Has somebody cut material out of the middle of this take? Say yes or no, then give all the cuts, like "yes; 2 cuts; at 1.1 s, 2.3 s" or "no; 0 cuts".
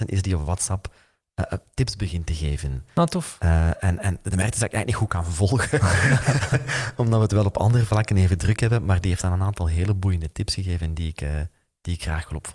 no; 0 cuts